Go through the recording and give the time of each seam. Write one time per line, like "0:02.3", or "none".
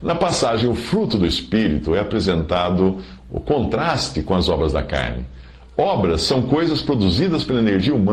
none